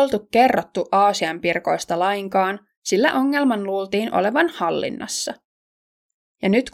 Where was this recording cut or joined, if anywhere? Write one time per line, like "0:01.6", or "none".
none